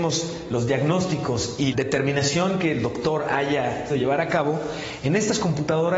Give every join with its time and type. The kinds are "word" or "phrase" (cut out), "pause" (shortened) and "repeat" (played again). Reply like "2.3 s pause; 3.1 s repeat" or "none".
1.7 s word; 3.9 s word

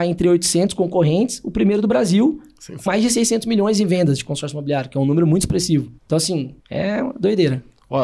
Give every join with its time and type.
2.9 s word; 6.0 s pause; 6.6 s pause

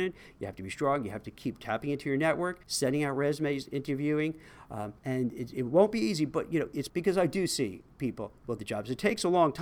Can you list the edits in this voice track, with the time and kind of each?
2.6 s pause; 5.0 s pause; 6.9 s word; 8.6 s word

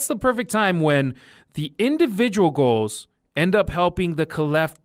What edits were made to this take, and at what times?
none

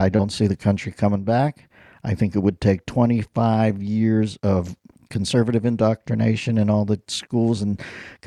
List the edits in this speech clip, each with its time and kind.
none

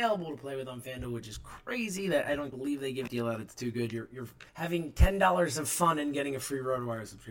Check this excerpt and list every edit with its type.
2.5 s word; 3.1 s word; 4.5 s pause

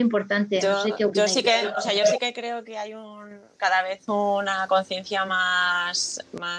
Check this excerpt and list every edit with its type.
none

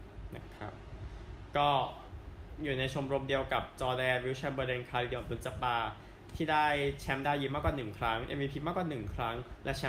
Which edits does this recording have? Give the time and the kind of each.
none

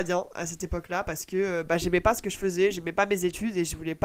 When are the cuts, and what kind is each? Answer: none

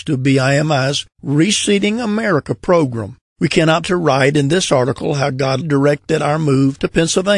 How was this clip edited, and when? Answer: 3.2 s pause; 3.8 s word; 5.6 s word

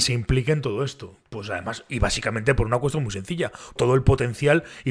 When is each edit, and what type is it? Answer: 3.8 s word

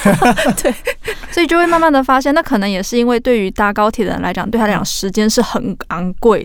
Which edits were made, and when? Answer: none

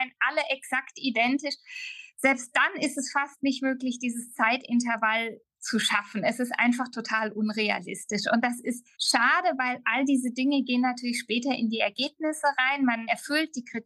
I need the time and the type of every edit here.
8.9 s pause

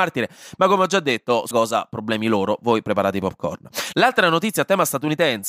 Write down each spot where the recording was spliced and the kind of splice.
1.5 s word

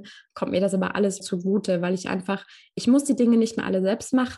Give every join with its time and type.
1.2 s word

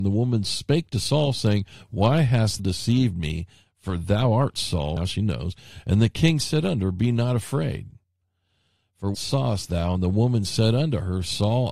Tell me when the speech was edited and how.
2.6 s word; 5.0 s word; 9.1 s word

